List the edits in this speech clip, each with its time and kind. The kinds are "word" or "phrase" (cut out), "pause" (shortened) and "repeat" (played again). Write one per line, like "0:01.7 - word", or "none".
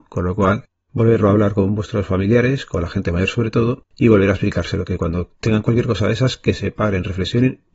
0:03.9 - pause

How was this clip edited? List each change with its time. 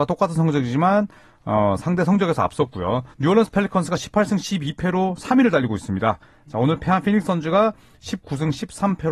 0:03.1 - pause

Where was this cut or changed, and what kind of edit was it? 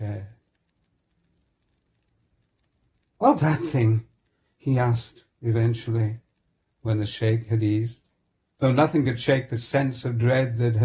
0:03.4 - word

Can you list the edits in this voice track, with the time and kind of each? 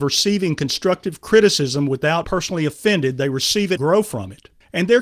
0:02.2 - word
0:03.8 - word

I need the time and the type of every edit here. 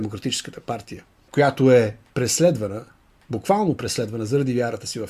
none

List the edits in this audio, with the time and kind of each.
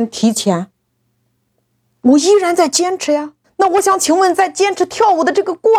0:03.4 - pause

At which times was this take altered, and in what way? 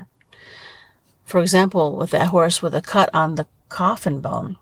none

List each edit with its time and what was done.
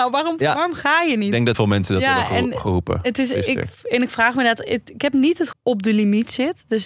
0:01.5 - word
0:05.5 - phrase

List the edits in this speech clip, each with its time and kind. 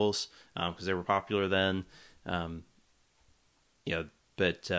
none

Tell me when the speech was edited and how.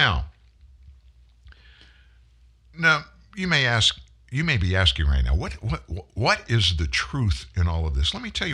none

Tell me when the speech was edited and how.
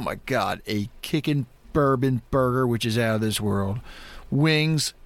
none

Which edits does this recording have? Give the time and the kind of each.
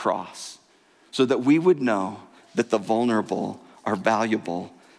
none

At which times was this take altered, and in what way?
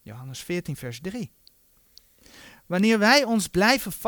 none

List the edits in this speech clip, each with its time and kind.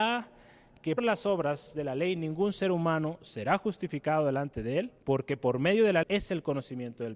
0:01.0 - word
0:05.0 - pause
0:06.0 - word

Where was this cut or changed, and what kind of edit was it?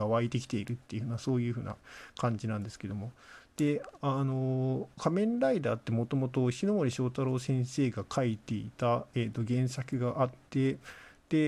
0:04.9 - pause

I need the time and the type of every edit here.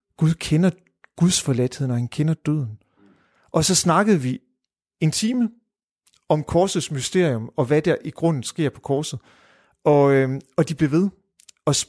none

